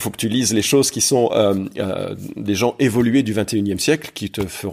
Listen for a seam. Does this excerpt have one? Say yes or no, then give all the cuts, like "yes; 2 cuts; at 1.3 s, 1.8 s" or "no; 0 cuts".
no; 0 cuts